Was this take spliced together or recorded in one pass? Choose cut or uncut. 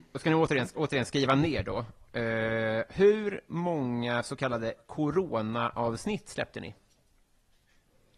uncut